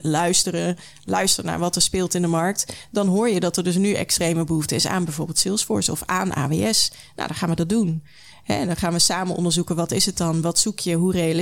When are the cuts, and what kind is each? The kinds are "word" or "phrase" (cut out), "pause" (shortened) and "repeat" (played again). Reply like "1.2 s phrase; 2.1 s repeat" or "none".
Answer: none